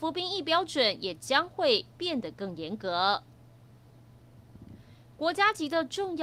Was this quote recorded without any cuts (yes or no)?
yes